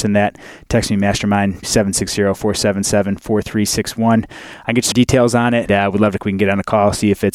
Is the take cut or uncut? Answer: cut